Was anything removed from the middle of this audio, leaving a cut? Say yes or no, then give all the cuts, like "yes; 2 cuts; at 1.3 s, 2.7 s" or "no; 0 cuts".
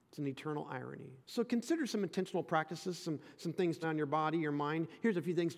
yes; 2 cuts; at 1.2 s, 3.8 s